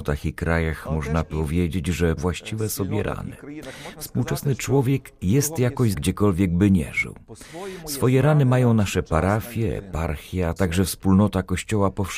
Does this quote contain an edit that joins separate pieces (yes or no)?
yes